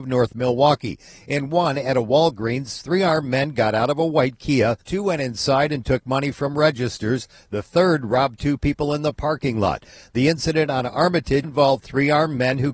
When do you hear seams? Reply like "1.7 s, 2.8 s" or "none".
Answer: 4.8 s, 11.4 s